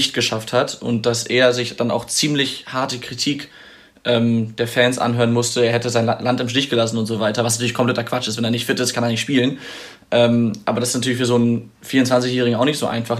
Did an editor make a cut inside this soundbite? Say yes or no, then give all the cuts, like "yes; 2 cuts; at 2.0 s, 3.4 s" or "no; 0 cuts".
no; 0 cuts